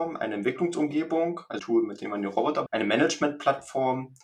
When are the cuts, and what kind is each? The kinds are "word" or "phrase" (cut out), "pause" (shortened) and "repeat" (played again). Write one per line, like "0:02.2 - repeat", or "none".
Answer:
0:01.6 - word
0:02.7 - word